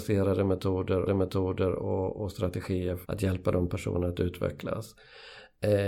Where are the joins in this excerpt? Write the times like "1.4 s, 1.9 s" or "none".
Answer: 1.1 s, 3.0 s